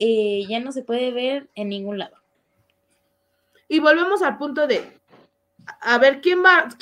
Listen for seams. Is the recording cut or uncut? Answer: uncut